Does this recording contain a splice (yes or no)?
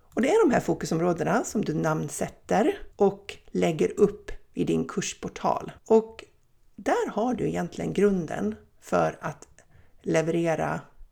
yes